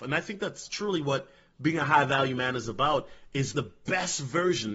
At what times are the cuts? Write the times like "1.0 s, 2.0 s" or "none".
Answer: 3.5 s